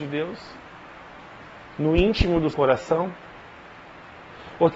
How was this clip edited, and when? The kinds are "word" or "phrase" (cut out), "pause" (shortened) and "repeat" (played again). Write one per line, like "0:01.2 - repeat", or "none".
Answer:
0:02.5 - word